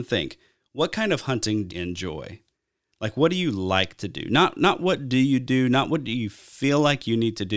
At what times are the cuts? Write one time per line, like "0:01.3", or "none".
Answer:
0:01.7